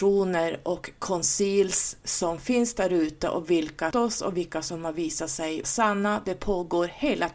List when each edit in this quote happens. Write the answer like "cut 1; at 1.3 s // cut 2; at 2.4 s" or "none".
cut 1; at 3.9 s // cut 2; at 5.6 s